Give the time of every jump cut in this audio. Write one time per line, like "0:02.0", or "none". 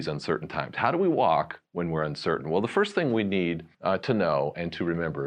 0:01.7
0:03.7